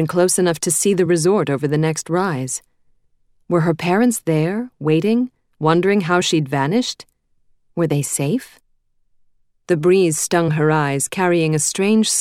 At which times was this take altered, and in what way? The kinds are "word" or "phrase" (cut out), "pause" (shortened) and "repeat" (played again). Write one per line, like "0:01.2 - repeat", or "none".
none